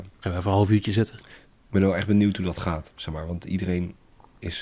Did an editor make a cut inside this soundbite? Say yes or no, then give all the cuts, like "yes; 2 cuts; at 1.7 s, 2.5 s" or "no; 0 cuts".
no; 0 cuts